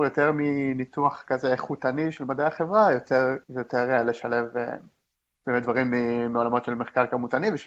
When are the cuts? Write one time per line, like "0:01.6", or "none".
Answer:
0:03.4

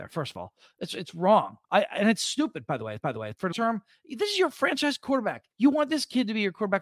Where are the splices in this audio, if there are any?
0:01.6
0:03.0
0:03.5
0:05.5

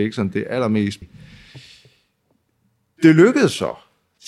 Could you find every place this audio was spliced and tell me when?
0:01.0

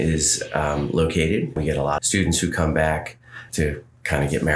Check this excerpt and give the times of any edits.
0:01.6
0:02.0
0:03.5

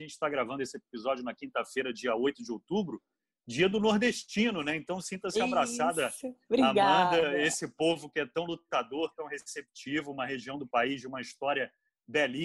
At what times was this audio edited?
none

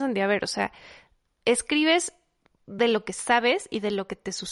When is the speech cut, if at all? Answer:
none

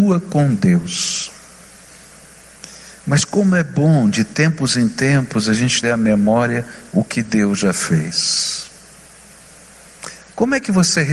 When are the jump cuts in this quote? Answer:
0:05.8

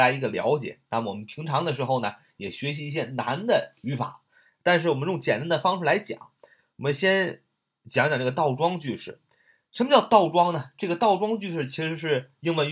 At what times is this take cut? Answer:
none

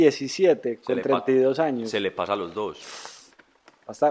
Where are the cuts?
none

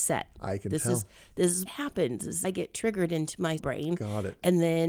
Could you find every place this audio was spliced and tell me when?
0:01.7
0:02.4
0:03.6

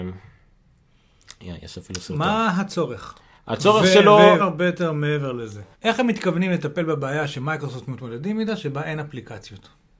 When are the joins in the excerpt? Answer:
0:03.4
0:04.4
0:05.7

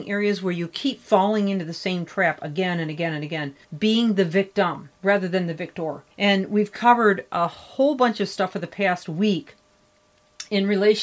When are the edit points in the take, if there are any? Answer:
0:03.6
0:06.1

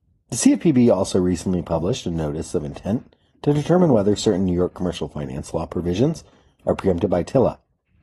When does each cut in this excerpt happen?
none

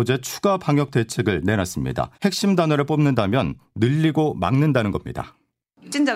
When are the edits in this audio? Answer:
0:02.1

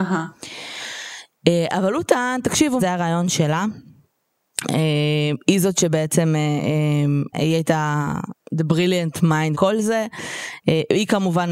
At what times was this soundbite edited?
0:02.8
0:07.3
0:08.4
0:09.5

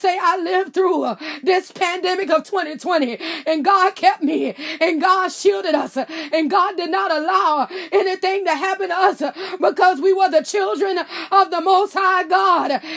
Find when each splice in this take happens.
none

